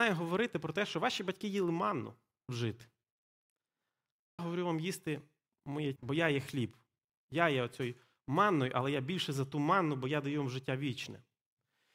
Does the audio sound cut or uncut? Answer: cut